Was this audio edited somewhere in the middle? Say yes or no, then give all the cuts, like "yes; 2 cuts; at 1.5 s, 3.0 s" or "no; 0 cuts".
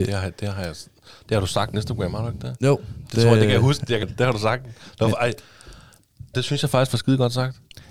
yes; 3 cuts; at 1.7 s, 4.0 s, 6.3 s